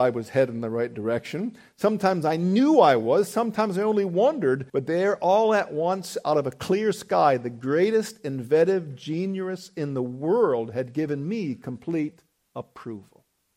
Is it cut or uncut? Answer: cut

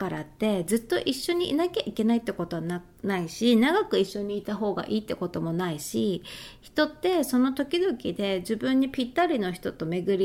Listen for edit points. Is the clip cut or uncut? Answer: uncut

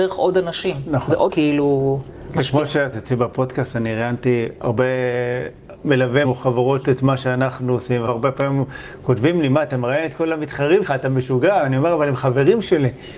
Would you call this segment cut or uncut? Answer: cut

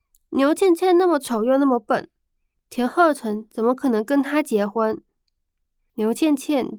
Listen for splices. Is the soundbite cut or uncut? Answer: uncut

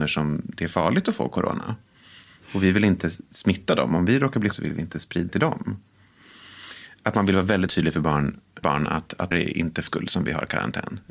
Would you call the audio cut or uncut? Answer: cut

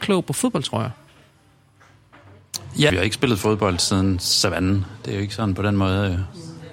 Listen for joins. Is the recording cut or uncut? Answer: cut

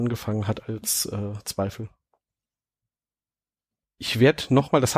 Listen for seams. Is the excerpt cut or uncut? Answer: uncut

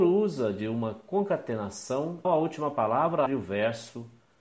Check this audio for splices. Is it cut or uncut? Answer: cut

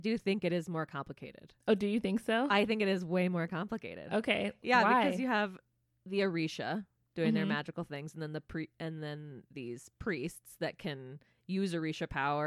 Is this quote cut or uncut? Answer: uncut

